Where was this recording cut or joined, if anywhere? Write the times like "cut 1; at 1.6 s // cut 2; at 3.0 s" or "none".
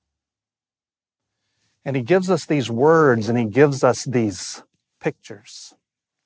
none

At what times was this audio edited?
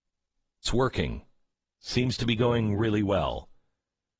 none

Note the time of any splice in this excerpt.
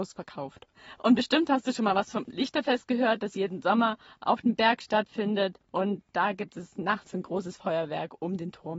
none

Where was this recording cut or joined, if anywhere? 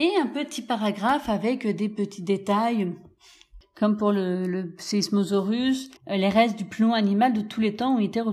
cut 1; at 6.0 s

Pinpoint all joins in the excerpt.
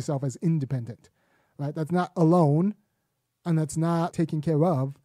cut 1; at 4.1 s

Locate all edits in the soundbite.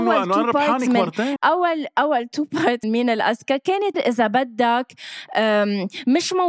cut 1; at 1.4 s // cut 2; at 2.8 s // cut 3; at 3.9 s

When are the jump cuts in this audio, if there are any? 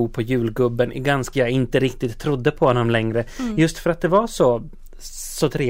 cut 1; at 1.3 s

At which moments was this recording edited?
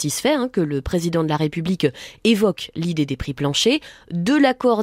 none

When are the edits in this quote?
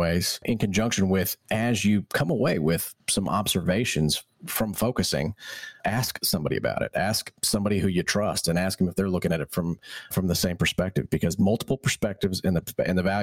cut 1; at 3.0 s // cut 2; at 10.1 s

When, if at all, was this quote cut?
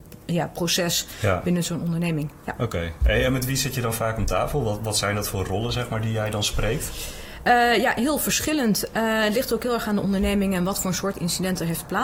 none

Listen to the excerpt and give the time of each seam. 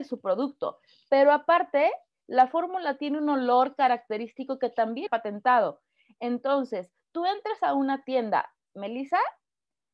cut 1; at 5.1 s

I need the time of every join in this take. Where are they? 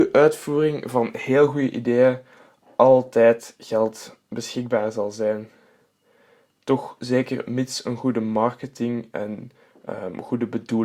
none

